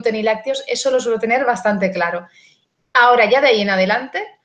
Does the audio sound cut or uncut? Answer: uncut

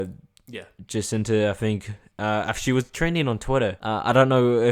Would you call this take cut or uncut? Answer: uncut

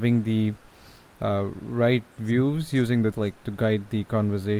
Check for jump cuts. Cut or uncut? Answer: cut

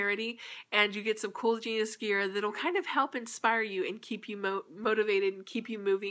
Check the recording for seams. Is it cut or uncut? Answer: uncut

